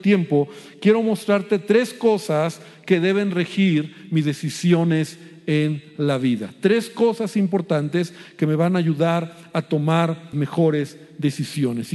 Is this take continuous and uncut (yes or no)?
no